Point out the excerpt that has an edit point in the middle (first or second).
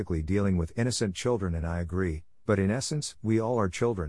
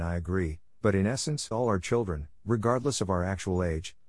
second